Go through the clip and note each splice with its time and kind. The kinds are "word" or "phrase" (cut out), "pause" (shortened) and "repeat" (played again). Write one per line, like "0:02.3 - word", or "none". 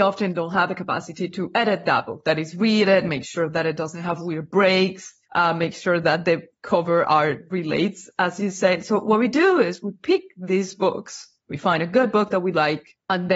0:05.2 - pause
0:11.4 - pause